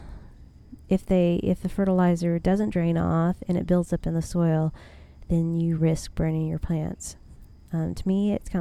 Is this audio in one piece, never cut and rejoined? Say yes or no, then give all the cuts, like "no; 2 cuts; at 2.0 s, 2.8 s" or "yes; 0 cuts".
yes; 0 cuts